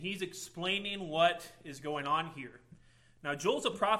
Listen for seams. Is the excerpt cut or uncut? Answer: uncut